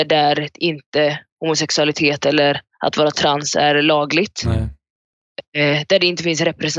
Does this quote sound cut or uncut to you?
cut